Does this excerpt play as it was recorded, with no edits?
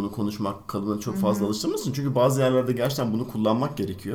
yes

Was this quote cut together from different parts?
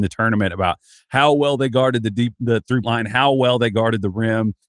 yes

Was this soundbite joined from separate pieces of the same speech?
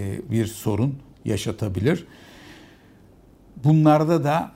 no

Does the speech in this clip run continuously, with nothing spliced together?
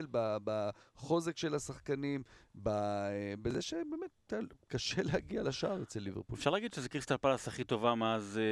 yes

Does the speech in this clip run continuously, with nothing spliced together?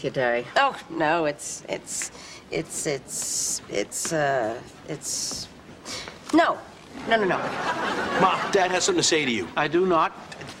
yes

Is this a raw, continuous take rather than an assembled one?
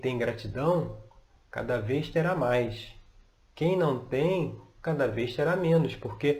yes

